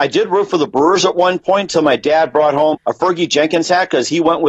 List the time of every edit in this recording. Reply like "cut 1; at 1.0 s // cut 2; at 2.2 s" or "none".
cut 1; at 2.7 s